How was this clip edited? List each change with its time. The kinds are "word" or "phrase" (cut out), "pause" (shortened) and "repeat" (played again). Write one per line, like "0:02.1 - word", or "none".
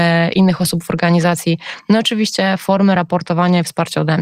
none